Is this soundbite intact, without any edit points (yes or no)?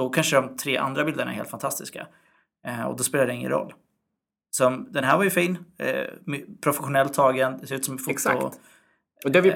yes